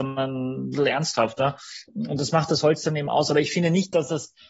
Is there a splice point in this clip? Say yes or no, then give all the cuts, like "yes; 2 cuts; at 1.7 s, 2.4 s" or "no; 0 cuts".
no; 0 cuts